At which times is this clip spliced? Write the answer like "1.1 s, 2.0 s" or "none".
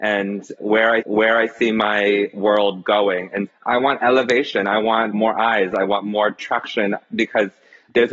1.0 s, 3.5 s